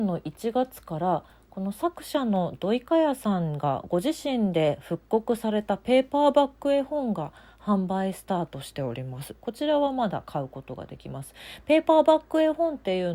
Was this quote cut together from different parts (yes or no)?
no